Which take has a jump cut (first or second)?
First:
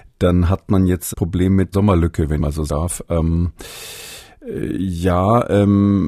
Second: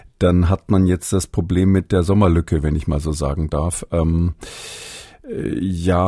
first